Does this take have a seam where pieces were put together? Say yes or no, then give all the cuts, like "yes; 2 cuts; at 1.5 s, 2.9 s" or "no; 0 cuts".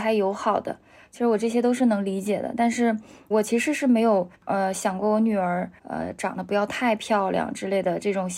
yes; 3 cuts; at 3.3 s, 4.3 s, 5.8 s